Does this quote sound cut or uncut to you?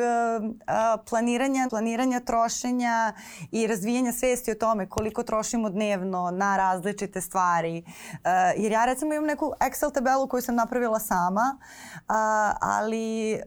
cut